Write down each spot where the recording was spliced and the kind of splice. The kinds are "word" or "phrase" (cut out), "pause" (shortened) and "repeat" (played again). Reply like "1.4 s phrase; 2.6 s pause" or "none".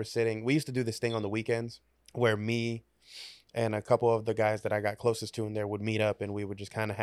2.1 s pause